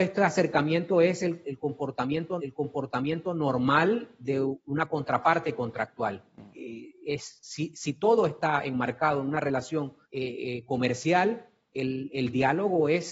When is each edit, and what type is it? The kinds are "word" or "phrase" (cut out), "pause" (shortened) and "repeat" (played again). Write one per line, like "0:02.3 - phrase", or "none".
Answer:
0:02.4 - repeat
0:10.0 - pause